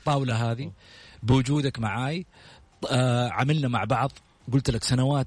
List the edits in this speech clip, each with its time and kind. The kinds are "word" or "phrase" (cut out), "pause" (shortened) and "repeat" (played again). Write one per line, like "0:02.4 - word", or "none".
none